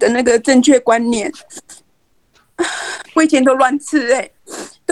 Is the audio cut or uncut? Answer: cut